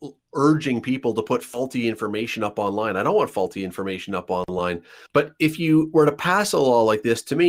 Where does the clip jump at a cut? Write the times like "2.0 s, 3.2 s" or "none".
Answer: 5.1 s

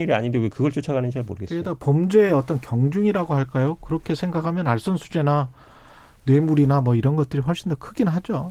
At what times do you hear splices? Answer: none

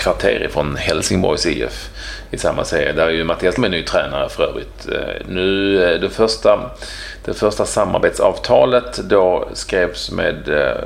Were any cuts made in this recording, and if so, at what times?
3.6 s

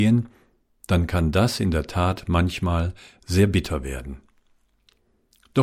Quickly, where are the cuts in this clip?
none

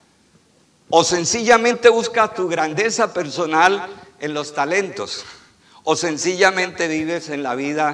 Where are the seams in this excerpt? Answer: none

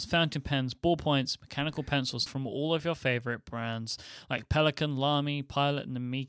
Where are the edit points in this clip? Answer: 2.3 s

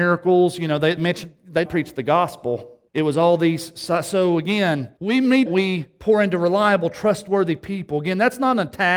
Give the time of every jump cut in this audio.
1.0 s, 1.7 s, 2.9 s, 5.0 s, 5.5 s

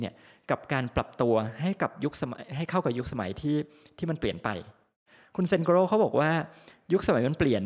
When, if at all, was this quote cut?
none

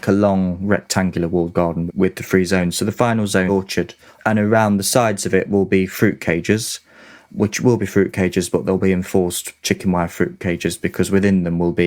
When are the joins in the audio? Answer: 1.9 s, 3.5 s, 4.1 s

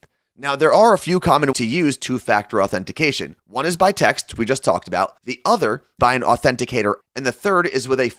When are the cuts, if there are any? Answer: 1.5 s, 3.4 s, 4.4 s, 5.2 s, 6.0 s, 7.0 s

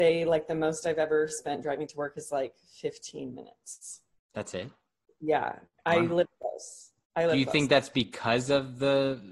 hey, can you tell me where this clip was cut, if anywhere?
none

